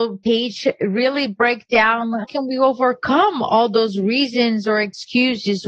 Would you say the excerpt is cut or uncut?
cut